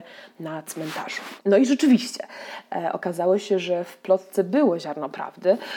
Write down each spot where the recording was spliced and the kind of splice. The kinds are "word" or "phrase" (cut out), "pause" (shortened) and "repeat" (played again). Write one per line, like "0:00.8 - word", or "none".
0:01.4 - pause